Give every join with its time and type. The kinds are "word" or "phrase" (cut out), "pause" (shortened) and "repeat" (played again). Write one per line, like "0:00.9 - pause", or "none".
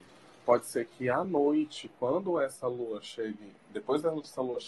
none